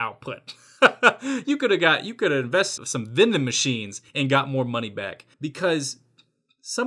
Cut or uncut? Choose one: cut